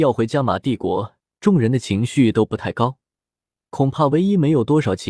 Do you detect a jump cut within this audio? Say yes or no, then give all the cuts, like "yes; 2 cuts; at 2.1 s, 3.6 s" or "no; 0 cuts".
yes; 1 cut; at 1.2 s